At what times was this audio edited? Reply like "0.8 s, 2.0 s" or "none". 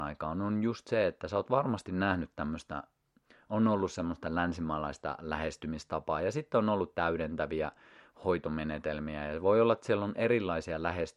none

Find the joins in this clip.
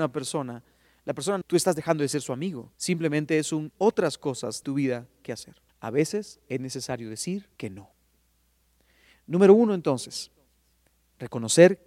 1.4 s, 2.7 s, 3.7 s, 4.6 s, 5.7 s, 7.6 s

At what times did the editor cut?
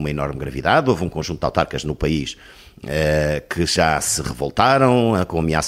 none

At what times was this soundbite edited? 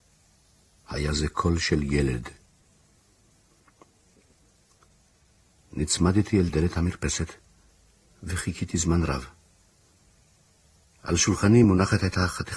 none

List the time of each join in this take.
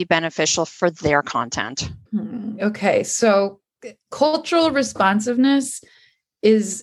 2.1 s

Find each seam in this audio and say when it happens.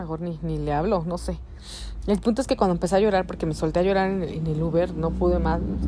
none

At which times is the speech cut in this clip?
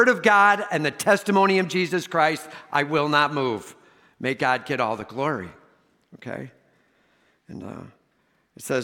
none

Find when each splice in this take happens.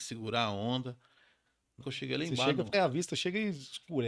1.8 s, 2.7 s

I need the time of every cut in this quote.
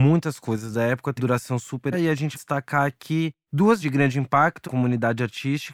1.2 s, 1.9 s, 2.3 s, 3.8 s, 4.6 s

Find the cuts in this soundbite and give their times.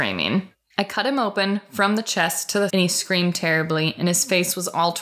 2.7 s

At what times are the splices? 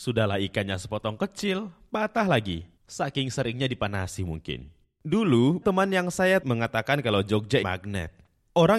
2.8 s, 5.6 s, 6.4 s, 7.6 s

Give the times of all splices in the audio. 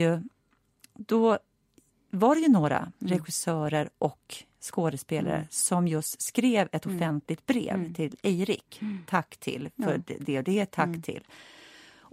none

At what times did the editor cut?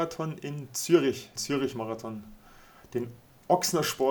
1.4 s

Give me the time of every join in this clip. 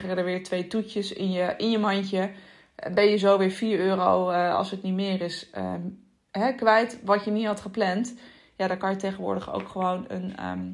none

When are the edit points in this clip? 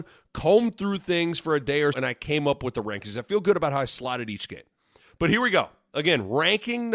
1.9 s

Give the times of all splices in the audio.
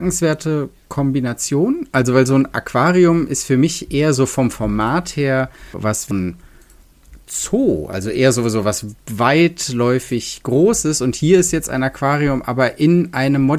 5.7 s, 6.1 s

